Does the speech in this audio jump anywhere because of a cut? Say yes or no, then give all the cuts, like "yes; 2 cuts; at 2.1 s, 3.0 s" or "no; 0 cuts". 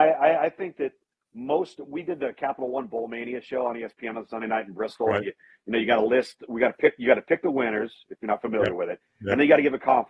no; 0 cuts